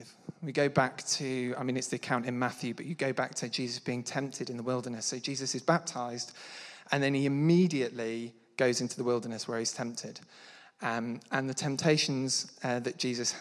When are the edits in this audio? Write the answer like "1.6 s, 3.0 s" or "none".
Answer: none

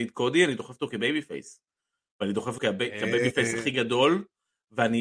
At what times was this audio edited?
2.6 s

